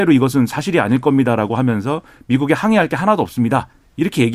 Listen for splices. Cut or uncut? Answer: uncut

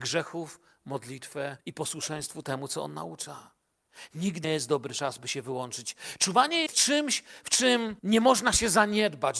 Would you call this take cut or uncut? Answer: cut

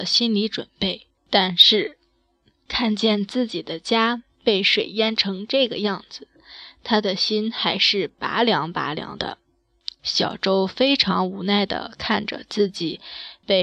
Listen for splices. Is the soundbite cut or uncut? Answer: cut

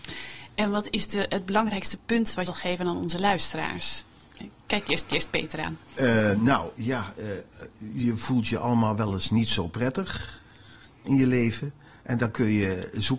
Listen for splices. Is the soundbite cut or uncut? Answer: cut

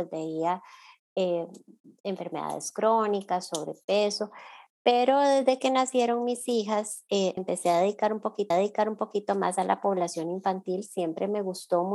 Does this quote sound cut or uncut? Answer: cut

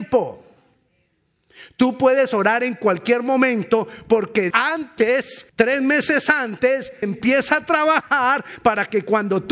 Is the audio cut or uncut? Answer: cut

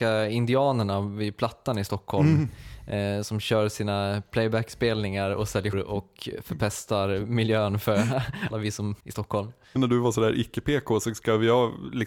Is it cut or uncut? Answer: cut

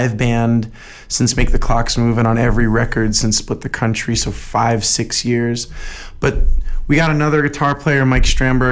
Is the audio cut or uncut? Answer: uncut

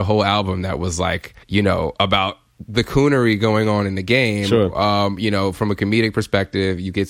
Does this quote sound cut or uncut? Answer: cut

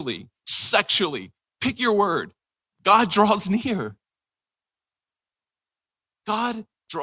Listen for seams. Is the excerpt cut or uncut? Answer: uncut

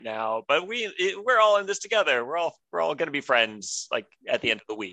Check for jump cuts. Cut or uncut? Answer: uncut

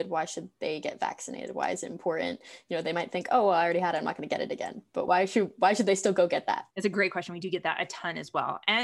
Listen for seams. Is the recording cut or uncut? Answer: cut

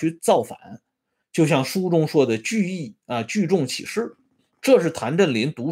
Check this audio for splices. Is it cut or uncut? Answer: cut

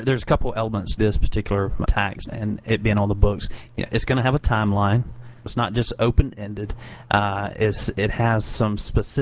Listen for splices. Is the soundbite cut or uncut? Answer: cut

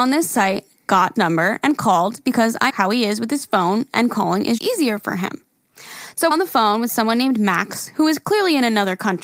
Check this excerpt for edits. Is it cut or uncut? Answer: cut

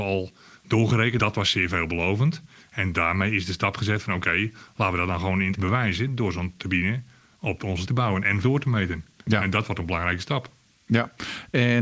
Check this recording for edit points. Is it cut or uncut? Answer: cut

